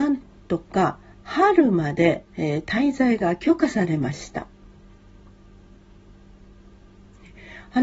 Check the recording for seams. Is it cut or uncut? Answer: cut